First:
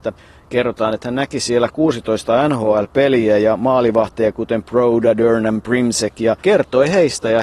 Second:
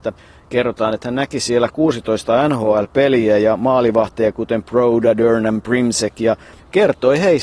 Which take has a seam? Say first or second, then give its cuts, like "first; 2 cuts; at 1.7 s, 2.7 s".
first; 1 cut; at 6.4 s